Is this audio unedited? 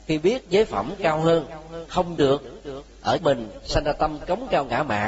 no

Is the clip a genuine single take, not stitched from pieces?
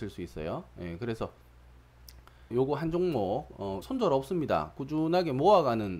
no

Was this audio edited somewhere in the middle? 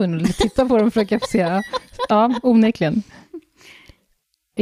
no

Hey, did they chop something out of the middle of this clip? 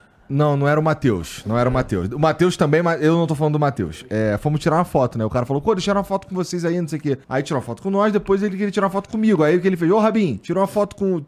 yes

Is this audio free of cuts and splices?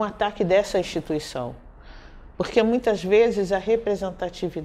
no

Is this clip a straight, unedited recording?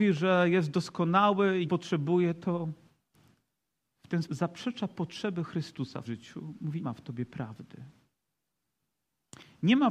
no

